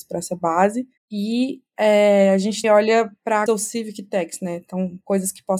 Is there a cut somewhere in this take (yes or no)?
yes